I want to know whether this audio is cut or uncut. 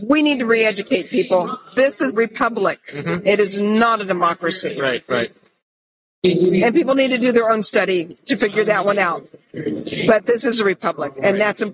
cut